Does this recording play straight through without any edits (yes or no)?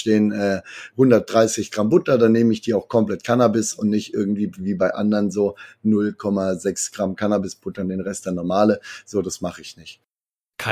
no